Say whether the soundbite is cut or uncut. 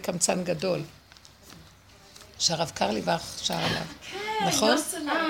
uncut